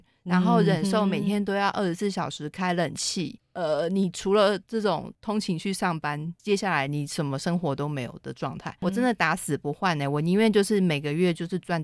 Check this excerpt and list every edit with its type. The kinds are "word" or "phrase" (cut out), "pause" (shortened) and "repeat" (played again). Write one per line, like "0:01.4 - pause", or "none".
none